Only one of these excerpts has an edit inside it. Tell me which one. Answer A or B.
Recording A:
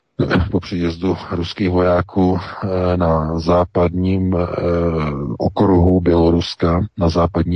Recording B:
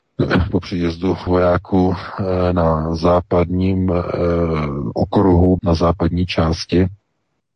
B